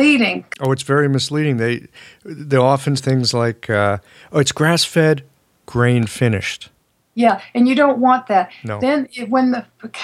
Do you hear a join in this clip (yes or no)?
yes